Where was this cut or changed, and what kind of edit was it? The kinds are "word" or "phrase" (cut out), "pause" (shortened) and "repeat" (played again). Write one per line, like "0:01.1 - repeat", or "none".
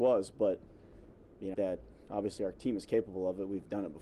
0:01.5 - phrase